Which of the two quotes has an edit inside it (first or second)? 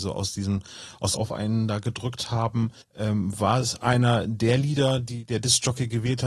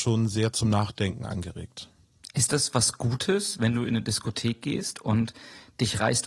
first